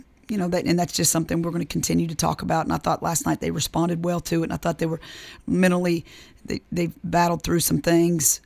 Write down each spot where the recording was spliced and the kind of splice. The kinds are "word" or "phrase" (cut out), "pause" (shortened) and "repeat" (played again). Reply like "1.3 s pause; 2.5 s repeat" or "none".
none